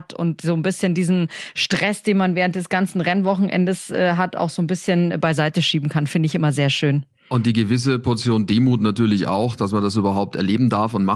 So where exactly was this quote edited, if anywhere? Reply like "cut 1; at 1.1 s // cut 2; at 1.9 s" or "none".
none